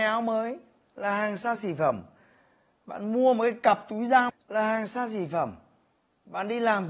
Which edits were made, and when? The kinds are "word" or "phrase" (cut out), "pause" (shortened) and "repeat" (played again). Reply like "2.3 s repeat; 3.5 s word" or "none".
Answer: 4.3 s word